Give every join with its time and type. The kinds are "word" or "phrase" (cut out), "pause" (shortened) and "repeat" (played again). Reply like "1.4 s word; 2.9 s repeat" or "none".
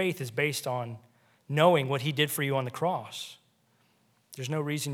none